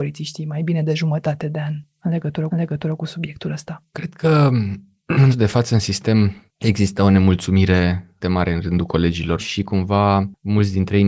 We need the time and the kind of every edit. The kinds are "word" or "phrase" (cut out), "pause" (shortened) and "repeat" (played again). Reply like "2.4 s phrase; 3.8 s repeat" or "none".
2.5 s repeat; 3.9 s pause; 5.3 s word; 8.2 s word; 9.4 s word

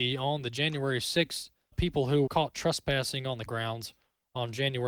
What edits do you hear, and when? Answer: 1.7 s word; 2.3 s word; 3.5 s word

